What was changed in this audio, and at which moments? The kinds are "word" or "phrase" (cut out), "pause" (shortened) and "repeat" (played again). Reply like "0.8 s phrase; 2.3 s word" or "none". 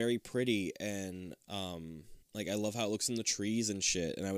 2.2 s pause